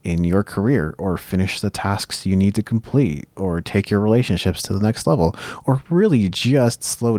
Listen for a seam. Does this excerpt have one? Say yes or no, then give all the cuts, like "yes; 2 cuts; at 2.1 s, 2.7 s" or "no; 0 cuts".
no; 0 cuts